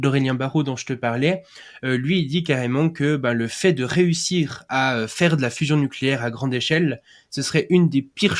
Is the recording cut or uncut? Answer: uncut